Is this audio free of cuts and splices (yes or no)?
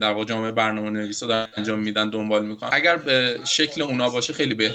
yes